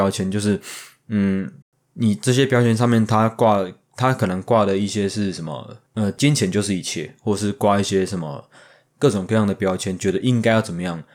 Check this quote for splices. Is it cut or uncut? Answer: cut